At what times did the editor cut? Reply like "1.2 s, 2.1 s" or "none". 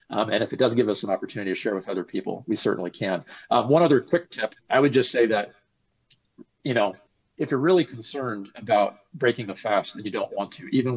4.6 s, 7.1 s